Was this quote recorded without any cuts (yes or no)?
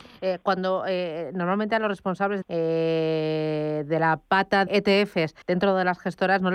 no